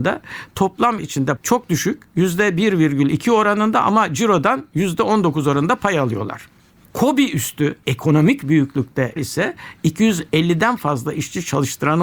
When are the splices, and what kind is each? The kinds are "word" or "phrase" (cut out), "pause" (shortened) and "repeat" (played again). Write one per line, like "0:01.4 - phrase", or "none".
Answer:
0:01.0 - word
0:01.4 - word
0:07.8 - word
0:09.2 - word

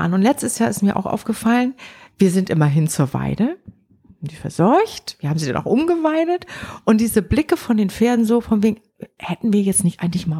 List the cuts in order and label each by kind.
none

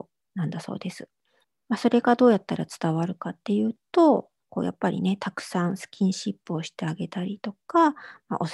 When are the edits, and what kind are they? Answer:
0:01.4 - pause

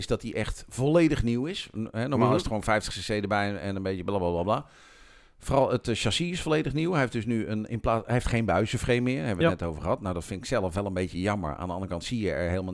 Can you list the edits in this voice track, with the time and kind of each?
none

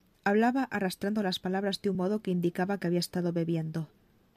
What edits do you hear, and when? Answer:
none

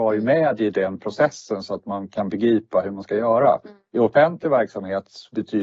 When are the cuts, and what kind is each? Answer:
none

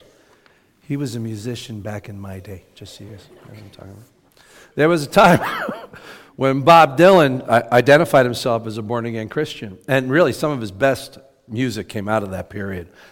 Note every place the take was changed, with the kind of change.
none

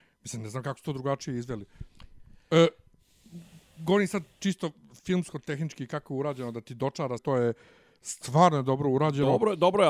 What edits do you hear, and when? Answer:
0:07.2 - word

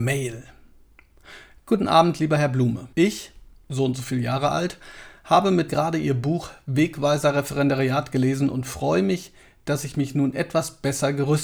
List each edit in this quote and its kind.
0:02.9 - pause
0:05.7 - word

